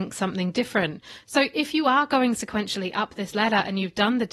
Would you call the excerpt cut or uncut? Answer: uncut